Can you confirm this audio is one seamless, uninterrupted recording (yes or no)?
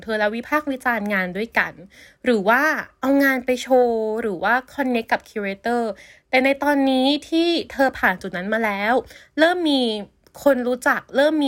yes